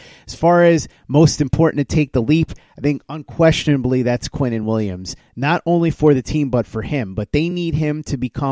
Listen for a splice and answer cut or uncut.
uncut